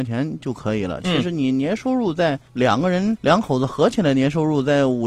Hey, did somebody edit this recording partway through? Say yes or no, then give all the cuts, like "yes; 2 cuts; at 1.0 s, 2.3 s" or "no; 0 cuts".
yes; 2 cuts; at 2.5 s, 3.2 s